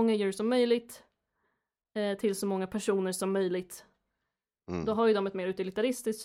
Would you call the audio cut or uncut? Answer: uncut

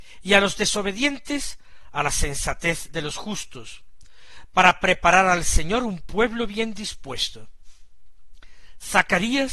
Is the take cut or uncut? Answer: uncut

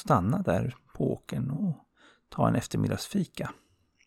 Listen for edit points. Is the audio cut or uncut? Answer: uncut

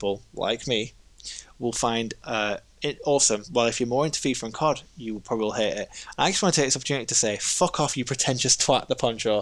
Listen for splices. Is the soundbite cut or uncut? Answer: uncut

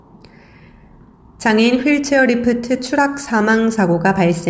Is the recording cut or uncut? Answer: uncut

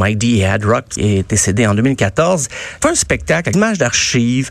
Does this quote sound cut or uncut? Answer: cut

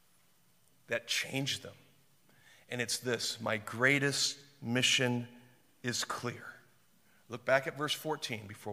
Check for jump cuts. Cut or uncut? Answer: uncut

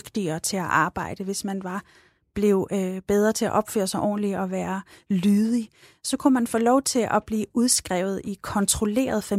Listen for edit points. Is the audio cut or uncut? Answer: uncut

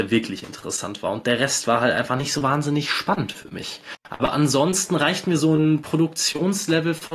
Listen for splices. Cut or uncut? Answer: uncut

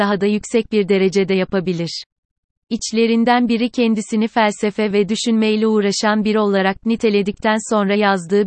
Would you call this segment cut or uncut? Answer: uncut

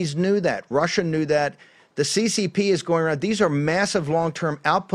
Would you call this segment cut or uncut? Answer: uncut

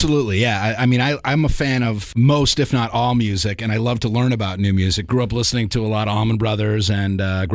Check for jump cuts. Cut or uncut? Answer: uncut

